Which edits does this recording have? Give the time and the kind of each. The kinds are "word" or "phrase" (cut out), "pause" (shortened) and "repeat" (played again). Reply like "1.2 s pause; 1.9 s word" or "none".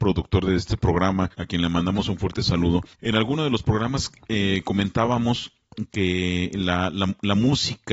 1.3 s pause; 2.9 s pause

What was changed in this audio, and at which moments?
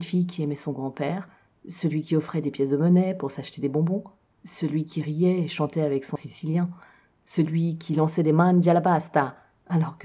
6.2 s word

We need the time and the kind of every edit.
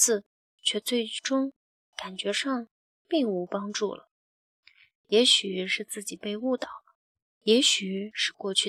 none

